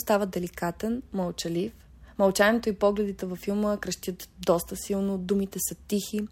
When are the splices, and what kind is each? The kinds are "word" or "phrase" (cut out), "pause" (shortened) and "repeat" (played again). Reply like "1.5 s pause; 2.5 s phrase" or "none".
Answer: none